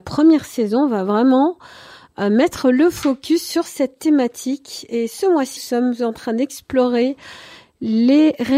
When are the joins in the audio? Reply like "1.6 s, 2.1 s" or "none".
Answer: 5.6 s